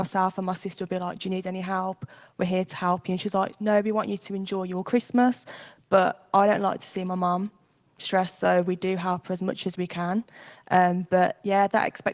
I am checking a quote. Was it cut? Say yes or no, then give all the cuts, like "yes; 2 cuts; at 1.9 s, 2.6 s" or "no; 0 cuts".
no; 0 cuts